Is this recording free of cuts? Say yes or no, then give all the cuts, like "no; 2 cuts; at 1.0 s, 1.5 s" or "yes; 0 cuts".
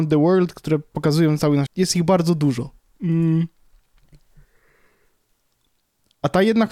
no; 1 cut; at 1.7 s